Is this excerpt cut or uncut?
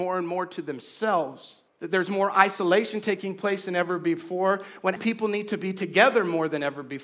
cut